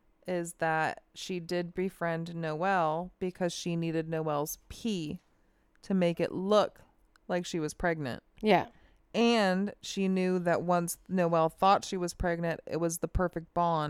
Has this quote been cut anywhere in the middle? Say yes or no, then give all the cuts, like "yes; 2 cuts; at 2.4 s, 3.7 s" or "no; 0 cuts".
no; 0 cuts